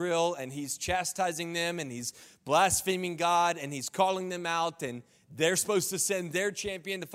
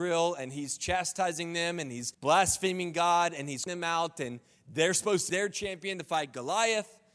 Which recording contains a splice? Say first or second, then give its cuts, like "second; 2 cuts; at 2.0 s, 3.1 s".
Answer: second; 3 cuts; at 2.1 s, 3.7 s, 5.3 s